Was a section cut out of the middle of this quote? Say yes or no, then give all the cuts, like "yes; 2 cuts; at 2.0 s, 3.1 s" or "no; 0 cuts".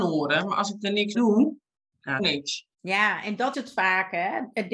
yes; 5 cuts; at 1.1 s, 1.8 s, 2.2 s, 2.7 s, 3.5 s